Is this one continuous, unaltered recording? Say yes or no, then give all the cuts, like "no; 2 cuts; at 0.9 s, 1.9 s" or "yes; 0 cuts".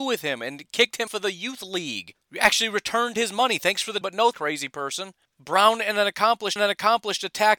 no; 6 cuts; at 1.1 s, 2.2 s, 4.0 s, 4.3 s, 5.3 s, 6.6 s